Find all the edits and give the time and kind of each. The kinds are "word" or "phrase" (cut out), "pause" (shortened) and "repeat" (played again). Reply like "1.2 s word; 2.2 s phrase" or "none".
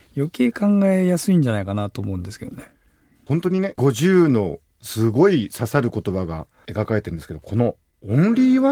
none